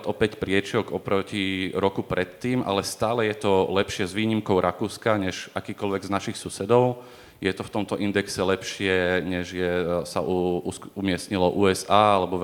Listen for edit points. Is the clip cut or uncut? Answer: uncut